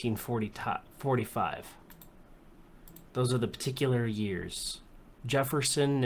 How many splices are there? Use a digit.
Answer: 1